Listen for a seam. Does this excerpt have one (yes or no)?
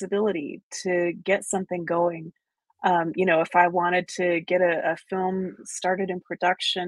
yes